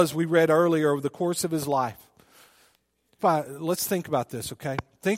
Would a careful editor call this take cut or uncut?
cut